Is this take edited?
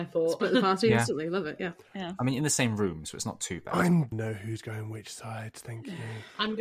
yes; 2 cuts; at 1.9 s, 4.1 s

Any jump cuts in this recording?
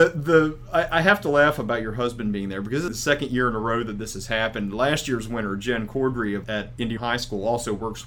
yes; 3 cuts; at 2.9 s, 6.4 s, 7.0 s

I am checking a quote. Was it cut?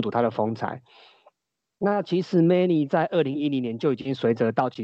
no; 0 cuts

